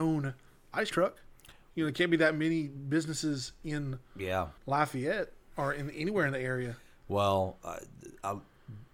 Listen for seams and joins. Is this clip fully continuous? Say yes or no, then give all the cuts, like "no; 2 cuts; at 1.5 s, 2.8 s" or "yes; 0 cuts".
no; 2 cuts; at 0.9 s, 4.6 s